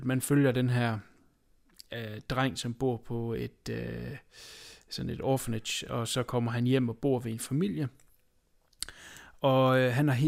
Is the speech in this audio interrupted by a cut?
no; 0 cuts

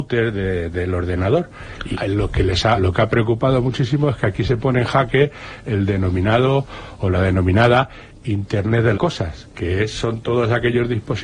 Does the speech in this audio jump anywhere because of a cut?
yes; 3 cuts; at 1.9 s, 2.8 s, 8.9 s

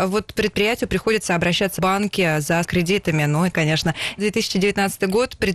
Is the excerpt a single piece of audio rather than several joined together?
no; 4 cuts; at 1.8 s, 2.6 s, 3.5 s, 4.2 s

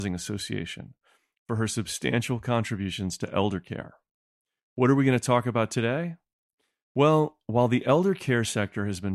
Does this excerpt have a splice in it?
no; 0 cuts

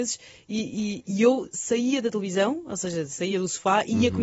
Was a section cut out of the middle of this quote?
no; 0 cuts

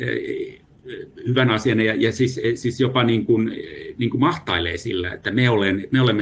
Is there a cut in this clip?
no; 0 cuts

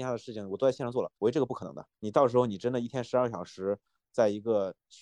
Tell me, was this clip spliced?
yes; 1 cut; at 1.2 s

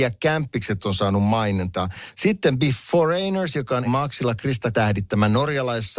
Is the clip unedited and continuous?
no; 2 cuts; at 3.8 s, 4.7 s

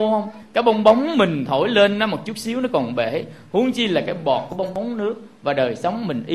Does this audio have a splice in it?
no; 0 cuts

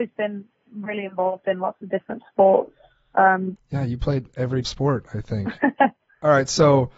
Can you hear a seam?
yes; 2 cuts; at 3.6 s, 4.6 s

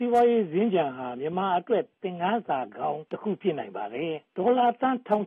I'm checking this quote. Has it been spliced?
yes; 2 cuts; at 3.1 s, 4.3 s

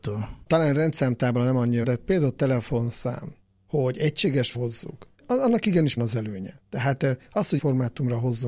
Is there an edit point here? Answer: yes; 5 cuts; at 1.8 s, 4.5 s, 6.0 s, 6.7 s, 7.6 s

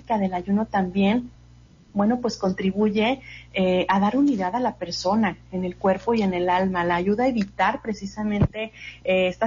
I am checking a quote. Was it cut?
no; 0 cuts

